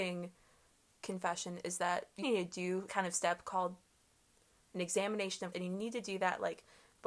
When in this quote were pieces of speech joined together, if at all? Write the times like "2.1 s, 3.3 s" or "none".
1.0 s, 2.2 s, 2.9 s, 5.5 s